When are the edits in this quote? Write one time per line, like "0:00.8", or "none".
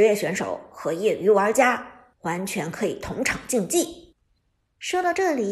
0:04.1